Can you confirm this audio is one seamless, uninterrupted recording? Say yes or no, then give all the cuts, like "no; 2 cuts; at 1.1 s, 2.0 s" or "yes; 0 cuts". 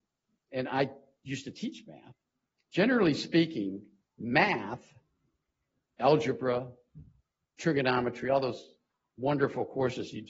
yes; 0 cuts